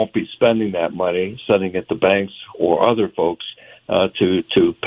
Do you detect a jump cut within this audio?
no; 0 cuts

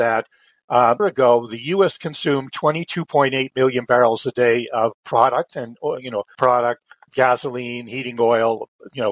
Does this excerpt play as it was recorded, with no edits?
no; 3 cuts; at 1.0 s, 6.3 s, 7.1 s

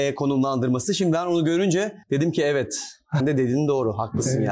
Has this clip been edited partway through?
yes; 2 cuts; at 2.0 s, 3.2 s

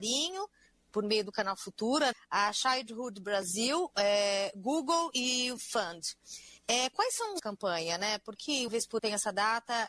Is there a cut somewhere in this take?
yes; 7 cuts; at 2.1 s, 5.6 s, 6.6 s, 7.4 s, 8.4 s, 8.7 s, 9.0 s

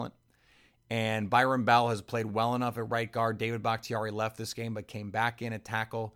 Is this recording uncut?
yes; 0 cuts

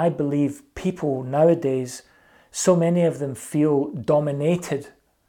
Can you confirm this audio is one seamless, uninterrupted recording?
yes; 0 cuts

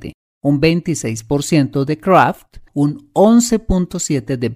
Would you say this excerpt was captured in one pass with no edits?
no; 1 cut; at 2.7 s

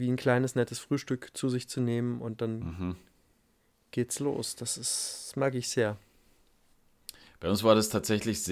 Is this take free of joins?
yes; 0 cuts

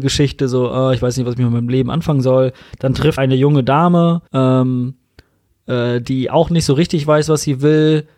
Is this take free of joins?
no; 2 cuts; at 3.2 s, 4.3 s

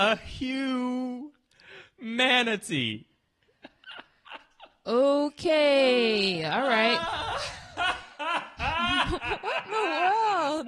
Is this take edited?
no; 0 cuts

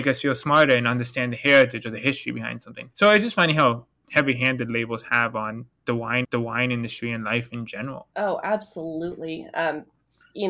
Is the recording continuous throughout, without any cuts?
no; 2 cuts; at 2.9 s, 6.2 s

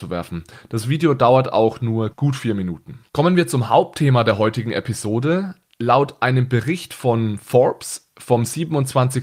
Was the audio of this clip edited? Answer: yes; 2 cuts; at 2.1 s, 3.1 s

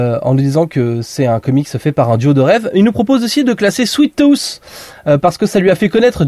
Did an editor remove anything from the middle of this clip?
no; 0 cuts

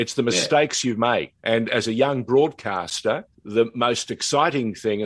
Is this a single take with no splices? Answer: no; 2 cuts; at 1.4 s, 3.3 s

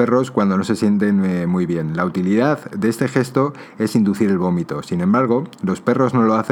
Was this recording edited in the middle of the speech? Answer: no; 0 cuts

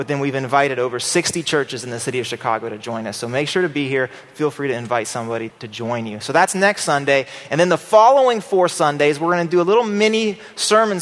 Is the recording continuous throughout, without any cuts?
no; 1 cut; at 5.5 s

